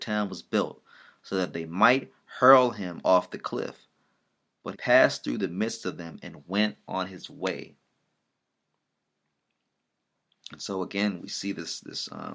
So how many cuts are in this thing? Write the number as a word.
two